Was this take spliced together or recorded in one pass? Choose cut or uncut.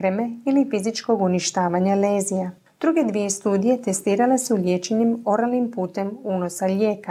uncut